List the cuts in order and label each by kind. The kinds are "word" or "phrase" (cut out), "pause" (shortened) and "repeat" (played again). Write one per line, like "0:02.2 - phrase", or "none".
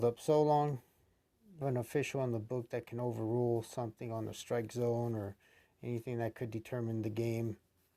0:01.6 - phrase